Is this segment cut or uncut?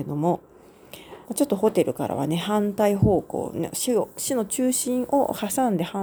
cut